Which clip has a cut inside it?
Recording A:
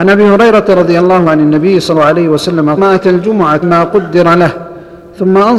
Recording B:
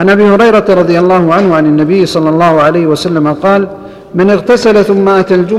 A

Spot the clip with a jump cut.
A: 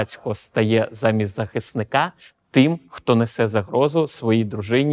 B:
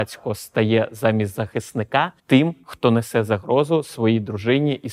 B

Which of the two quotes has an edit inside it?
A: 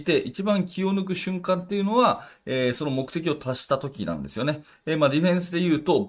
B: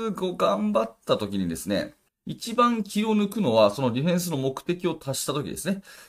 B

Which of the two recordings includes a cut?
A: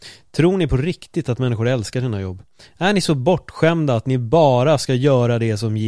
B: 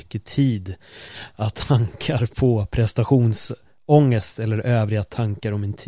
B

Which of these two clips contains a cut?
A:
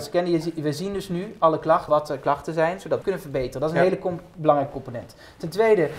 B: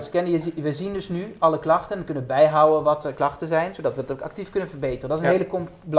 A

